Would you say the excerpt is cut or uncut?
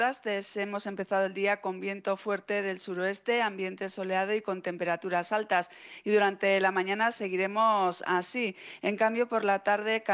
uncut